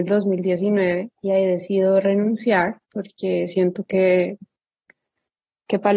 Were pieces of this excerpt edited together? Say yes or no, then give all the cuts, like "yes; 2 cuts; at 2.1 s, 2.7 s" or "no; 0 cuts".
yes; 2 cuts; at 1.2 s, 2.8 s